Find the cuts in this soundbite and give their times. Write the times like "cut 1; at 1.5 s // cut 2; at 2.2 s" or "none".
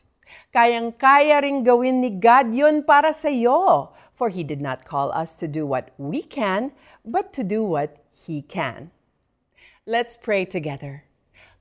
none